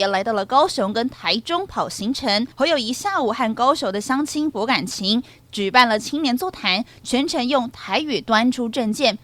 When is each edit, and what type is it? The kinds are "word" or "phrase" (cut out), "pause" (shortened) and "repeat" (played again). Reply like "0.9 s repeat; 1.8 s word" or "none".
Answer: 2.5 s pause